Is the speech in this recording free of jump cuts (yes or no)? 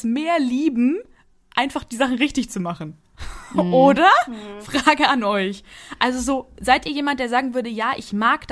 yes